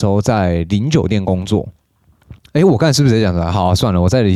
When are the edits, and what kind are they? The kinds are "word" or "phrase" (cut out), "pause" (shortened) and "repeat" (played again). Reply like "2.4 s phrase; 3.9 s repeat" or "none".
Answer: 2.4 s pause